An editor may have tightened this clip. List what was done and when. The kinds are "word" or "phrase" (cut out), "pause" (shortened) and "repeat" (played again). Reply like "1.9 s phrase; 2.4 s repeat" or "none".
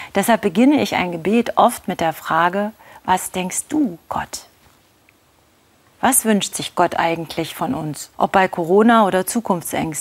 8.1 s pause